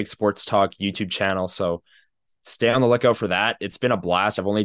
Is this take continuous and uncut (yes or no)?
yes